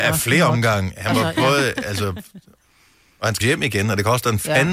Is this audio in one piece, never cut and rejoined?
no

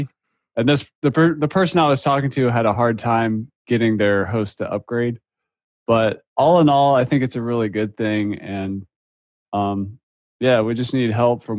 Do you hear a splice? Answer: no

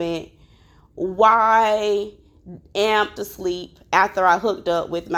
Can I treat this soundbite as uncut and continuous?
no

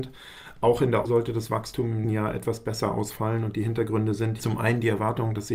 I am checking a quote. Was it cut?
yes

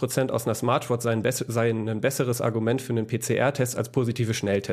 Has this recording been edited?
no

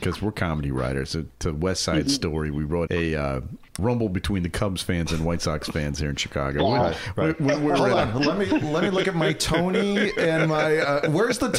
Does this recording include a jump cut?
yes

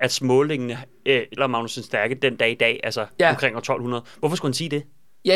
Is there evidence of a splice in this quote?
yes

